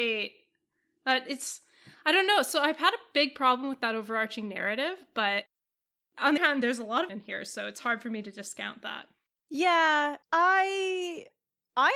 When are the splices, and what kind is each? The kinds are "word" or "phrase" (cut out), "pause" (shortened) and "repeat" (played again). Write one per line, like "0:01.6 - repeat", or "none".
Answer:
0:06.4 - word
0:07.1 - phrase
0:10.2 - pause